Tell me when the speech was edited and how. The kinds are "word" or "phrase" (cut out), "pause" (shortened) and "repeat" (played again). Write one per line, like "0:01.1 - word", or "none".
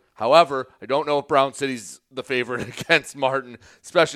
none